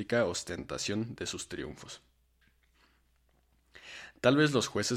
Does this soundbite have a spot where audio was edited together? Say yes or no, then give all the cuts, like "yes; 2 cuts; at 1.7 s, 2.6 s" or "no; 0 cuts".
no; 0 cuts